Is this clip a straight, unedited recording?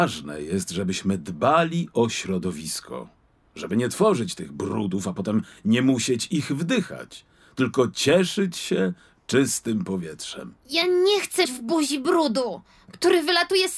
no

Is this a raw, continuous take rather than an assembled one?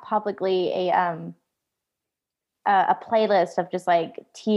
yes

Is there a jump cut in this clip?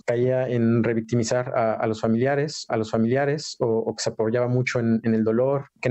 yes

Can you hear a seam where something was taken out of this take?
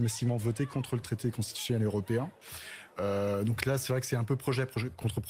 no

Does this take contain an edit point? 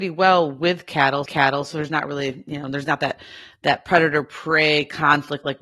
yes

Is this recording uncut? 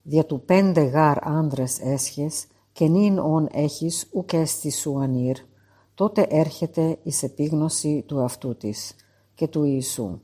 yes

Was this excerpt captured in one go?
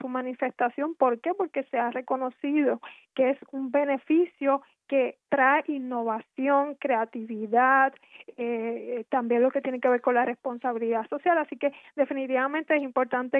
no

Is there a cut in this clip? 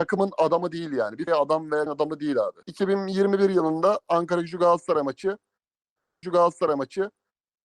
yes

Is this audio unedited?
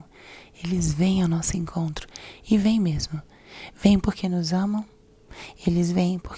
yes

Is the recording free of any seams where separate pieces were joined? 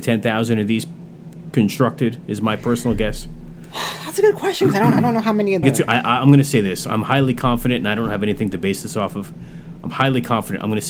no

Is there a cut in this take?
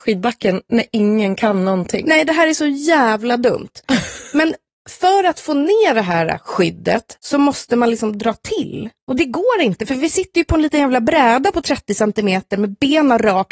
yes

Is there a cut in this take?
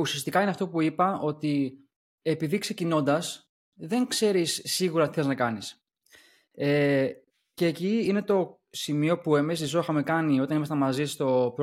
no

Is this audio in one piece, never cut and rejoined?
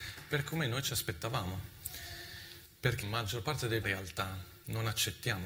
no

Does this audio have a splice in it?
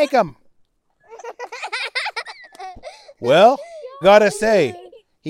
yes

